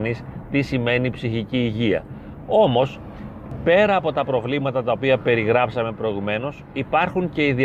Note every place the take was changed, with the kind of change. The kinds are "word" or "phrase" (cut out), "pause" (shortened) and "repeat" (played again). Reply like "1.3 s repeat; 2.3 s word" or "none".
none